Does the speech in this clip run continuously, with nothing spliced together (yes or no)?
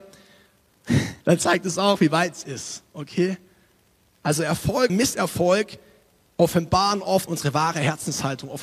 no